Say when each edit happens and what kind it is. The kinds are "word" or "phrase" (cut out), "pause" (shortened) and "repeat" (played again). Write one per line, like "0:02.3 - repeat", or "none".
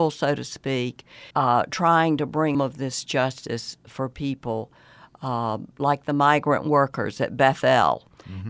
0:01.3 - pause
0:02.5 - phrase